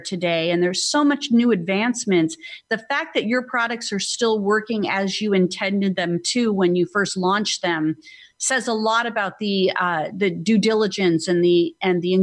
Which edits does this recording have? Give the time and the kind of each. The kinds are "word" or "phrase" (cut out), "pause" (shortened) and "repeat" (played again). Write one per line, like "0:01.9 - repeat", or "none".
none